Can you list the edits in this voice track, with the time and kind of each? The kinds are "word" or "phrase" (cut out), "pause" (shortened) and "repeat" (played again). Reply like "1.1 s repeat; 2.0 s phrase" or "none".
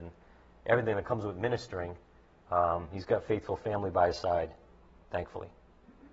none